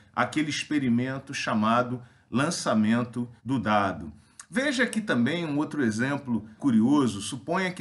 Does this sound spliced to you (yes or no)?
yes